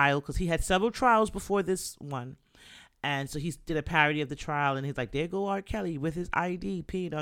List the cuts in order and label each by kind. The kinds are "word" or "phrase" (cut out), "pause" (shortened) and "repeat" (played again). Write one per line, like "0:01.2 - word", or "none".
none